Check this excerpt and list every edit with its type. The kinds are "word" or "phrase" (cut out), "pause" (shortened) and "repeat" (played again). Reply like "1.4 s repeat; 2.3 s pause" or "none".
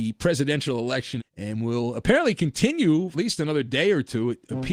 1.2 s phrase; 3.1 s phrase